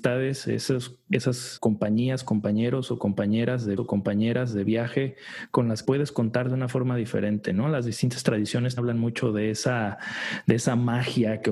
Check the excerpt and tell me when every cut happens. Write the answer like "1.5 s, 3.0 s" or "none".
1.6 s, 3.8 s, 5.8 s, 8.8 s